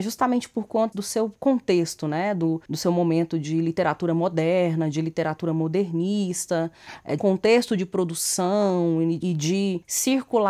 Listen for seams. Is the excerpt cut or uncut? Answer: cut